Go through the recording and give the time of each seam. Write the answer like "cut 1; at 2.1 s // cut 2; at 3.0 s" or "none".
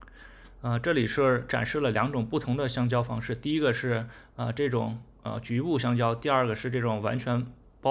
none